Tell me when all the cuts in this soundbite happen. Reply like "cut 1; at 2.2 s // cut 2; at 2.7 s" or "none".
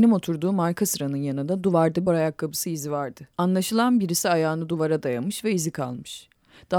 cut 1; at 2.1 s // cut 2; at 3.3 s